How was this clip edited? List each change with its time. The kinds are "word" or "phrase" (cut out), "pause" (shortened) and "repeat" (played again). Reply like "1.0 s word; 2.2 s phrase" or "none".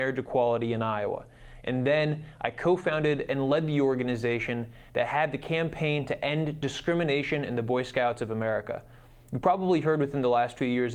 none